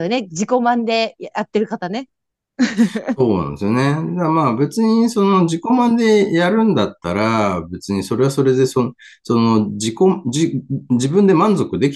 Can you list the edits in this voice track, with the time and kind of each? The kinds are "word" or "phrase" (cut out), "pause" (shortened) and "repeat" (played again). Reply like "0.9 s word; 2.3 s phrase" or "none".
none